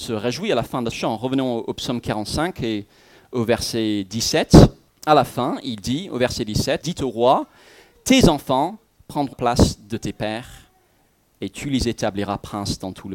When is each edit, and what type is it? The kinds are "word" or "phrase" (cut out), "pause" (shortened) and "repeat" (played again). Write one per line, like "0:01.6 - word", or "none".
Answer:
0:00.9 - word
0:04.9 - pause
0:06.8 - word
0:09.3 - word